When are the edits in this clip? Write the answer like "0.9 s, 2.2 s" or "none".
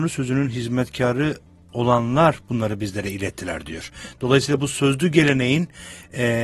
none